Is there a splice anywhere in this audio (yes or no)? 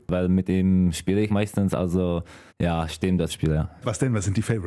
yes